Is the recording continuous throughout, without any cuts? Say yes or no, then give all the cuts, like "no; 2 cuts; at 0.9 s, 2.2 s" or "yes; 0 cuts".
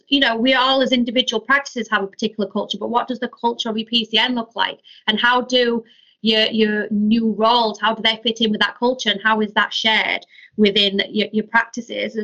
yes; 0 cuts